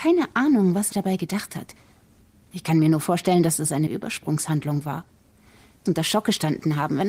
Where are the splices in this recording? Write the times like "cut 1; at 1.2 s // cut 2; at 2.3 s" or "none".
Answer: cut 1; at 0.9 s // cut 2; at 3.9 s // cut 3; at 5.9 s